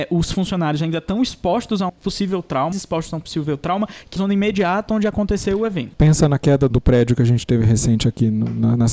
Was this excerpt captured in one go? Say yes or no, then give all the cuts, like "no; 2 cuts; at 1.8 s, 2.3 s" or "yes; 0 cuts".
no; 4 cuts; at 1.9 s, 2.7 s, 4.2 s, 6.7 s